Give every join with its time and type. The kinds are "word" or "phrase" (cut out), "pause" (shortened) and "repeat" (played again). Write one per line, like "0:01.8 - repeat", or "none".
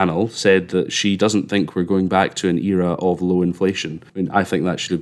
0:04.1 - pause